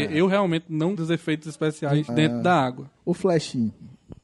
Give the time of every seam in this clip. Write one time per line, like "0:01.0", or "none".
0:00.9
0:02.1
0:03.0